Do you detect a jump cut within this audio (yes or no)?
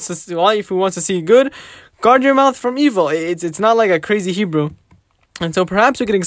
yes